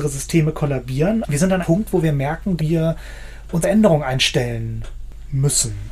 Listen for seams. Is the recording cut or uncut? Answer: cut